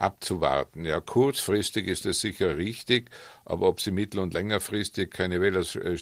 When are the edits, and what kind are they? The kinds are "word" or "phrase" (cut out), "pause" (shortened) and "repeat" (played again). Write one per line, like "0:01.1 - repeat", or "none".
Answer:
none